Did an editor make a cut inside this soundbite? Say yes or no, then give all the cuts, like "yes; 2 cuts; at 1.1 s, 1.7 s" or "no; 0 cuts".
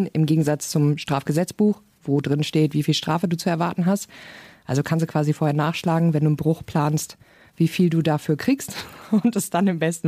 no; 0 cuts